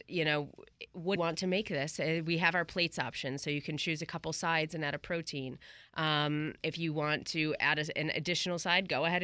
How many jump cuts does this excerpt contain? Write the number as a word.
one